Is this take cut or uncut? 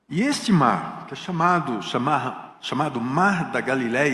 uncut